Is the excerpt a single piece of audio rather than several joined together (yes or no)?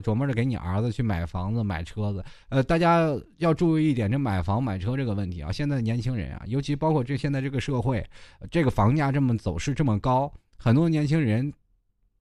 yes